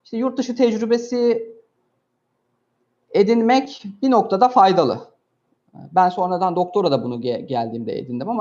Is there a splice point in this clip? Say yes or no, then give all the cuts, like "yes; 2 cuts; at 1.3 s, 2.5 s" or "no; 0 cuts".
no; 0 cuts